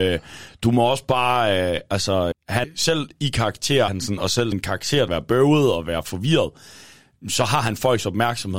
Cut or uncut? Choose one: cut